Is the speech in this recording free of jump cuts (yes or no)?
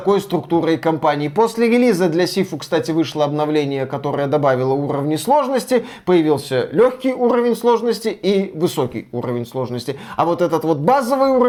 yes